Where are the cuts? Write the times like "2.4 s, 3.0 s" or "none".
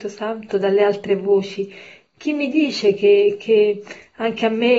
none